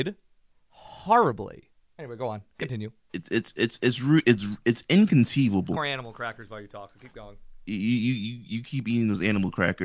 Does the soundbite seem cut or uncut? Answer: cut